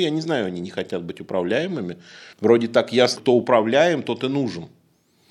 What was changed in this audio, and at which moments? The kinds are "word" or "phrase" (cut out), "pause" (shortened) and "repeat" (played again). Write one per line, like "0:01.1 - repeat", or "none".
0:02.3 - pause
0:03.2 - word